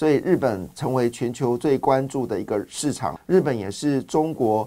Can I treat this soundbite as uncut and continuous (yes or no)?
no